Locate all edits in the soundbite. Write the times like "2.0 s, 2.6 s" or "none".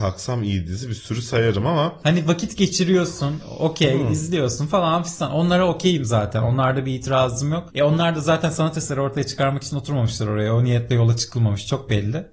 none